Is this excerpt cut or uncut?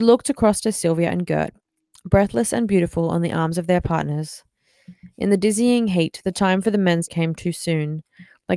cut